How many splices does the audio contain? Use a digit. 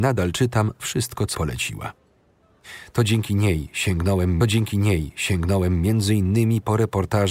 2